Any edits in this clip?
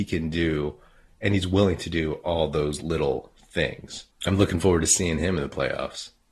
yes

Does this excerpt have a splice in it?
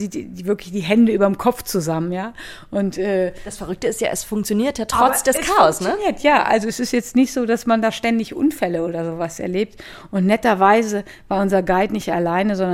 no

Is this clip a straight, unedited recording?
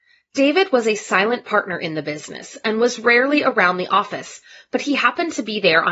yes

